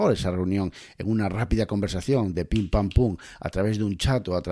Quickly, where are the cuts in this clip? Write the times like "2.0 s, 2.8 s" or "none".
none